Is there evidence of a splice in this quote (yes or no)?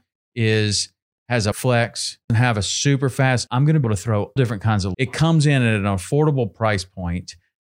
yes